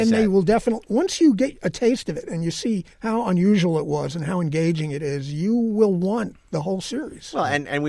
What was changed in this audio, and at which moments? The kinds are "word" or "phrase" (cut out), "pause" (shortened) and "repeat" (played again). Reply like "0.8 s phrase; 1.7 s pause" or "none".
2.9 s pause